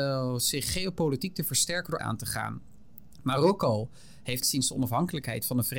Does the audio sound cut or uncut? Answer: cut